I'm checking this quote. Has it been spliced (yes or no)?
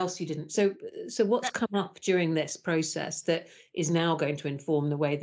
no